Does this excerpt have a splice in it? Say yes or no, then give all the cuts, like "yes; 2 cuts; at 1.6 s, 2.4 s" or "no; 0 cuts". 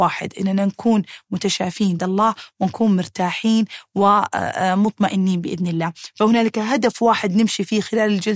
yes; 1 cut; at 2.0 s